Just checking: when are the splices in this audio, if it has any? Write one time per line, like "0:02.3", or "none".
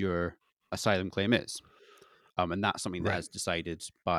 none